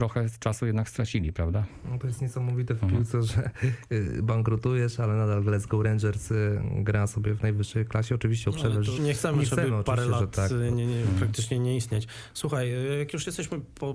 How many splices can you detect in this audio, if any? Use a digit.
2